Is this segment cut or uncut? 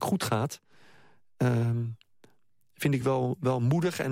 uncut